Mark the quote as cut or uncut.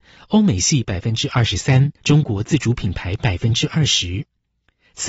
cut